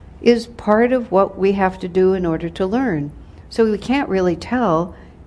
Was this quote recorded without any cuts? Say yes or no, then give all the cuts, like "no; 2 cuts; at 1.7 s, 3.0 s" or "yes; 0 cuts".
yes; 0 cuts